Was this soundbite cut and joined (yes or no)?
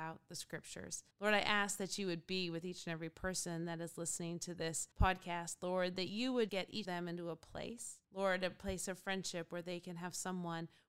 yes